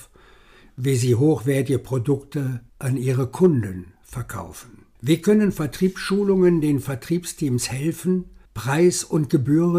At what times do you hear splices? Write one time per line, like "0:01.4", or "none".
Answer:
0:02.7
0:05.0
0:08.5